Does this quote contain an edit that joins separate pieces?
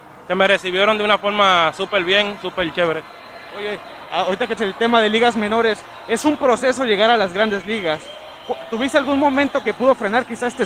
yes; 2 cuts; at 4.6 s, 9.6 s

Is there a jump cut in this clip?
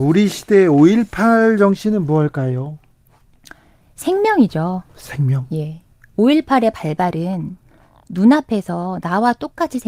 no; 0 cuts

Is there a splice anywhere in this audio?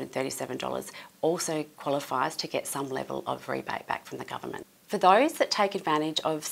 no; 0 cuts

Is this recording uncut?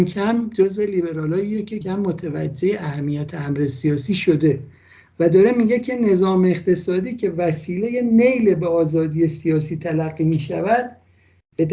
no; 1 cut; at 1.8 s

